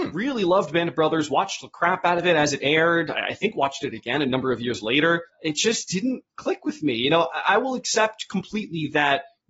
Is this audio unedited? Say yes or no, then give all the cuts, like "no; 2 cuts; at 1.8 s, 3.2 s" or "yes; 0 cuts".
yes; 0 cuts